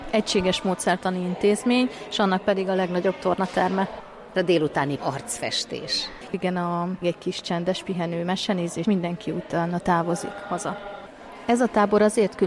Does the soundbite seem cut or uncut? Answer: cut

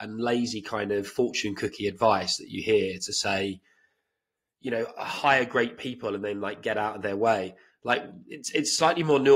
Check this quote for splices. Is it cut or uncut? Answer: uncut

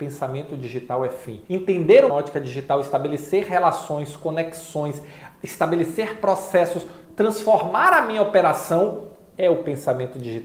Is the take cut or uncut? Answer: cut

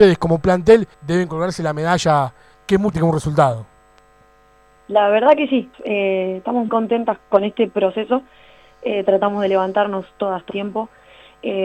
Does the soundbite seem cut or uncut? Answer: cut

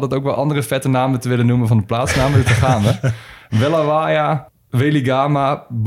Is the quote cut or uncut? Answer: uncut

